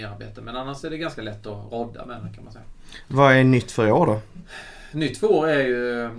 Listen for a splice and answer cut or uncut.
uncut